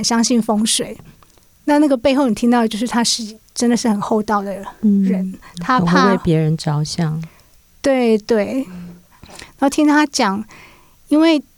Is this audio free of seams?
yes; 0 cuts

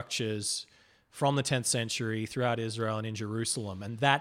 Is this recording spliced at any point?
no; 0 cuts

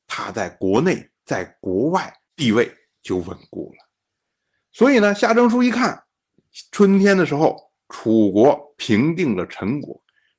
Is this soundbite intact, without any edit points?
yes; 0 cuts

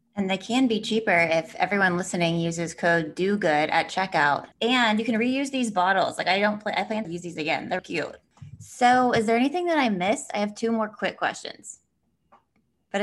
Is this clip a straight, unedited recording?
no; 3 cuts; at 4.5 s, 7.0 s, 7.8 s

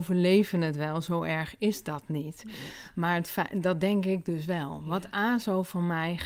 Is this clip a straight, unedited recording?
yes; 0 cuts

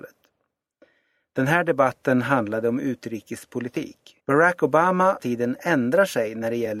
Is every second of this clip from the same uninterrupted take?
no; 2 cuts; at 4.2 s, 5.2 s

